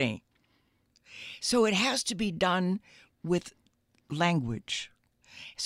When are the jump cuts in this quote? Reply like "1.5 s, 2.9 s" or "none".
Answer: none